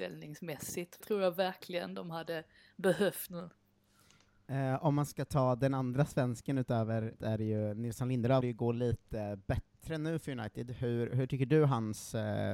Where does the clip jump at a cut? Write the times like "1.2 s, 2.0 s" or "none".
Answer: 1.0 s, 3.3 s, 7.2 s, 8.4 s